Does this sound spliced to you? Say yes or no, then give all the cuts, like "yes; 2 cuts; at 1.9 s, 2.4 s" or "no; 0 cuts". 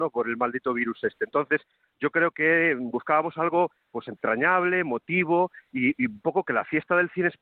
no; 0 cuts